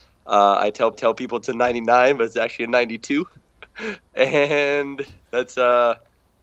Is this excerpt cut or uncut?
cut